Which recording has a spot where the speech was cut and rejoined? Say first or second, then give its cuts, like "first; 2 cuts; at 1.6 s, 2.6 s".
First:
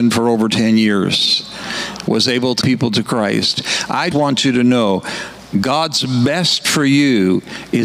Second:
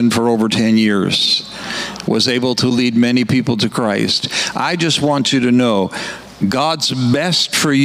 first; 2 cuts; at 2.6 s, 4.1 s